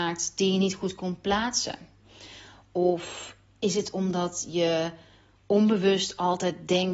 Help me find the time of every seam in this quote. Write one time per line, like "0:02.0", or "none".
none